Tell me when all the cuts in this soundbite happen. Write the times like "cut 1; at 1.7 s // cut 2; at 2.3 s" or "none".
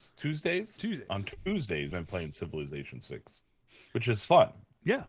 cut 1; at 1.9 s // cut 2; at 3.9 s